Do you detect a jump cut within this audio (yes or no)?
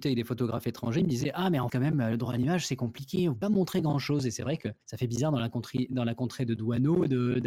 yes